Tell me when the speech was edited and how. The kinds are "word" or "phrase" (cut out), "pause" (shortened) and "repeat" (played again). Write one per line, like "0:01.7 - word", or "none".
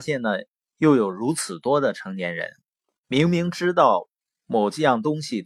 none